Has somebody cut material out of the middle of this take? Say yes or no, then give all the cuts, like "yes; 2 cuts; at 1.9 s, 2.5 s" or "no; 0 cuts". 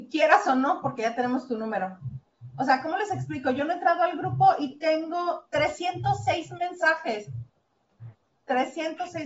no; 0 cuts